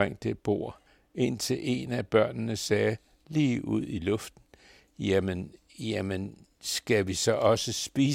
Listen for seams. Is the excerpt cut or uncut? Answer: uncut